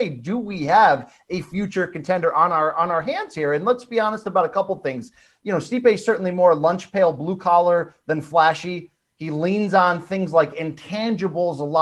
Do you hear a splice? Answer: no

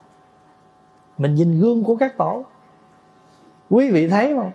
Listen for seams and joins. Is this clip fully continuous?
yes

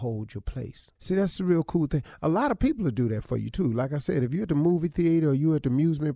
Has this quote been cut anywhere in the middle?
yes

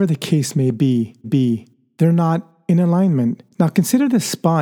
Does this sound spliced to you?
yes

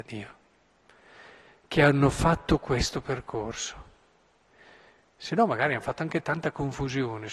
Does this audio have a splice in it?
no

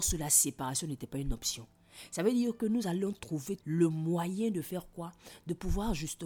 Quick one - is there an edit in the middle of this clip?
yes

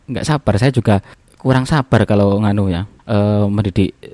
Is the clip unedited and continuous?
no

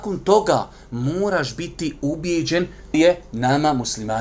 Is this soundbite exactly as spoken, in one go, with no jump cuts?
no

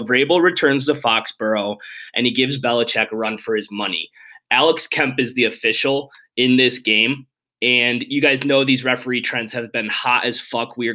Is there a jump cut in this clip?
no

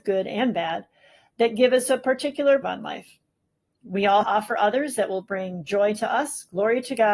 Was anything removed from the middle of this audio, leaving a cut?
yes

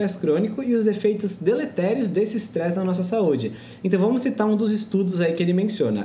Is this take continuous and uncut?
yes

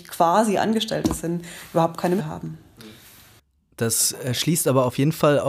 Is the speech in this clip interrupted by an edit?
yes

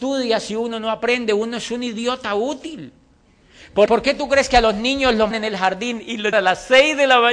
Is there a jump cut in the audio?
yes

